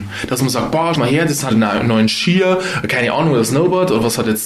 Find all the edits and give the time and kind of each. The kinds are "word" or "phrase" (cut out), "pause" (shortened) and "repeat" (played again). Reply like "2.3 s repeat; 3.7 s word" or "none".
0.9 s word; 1.5 s word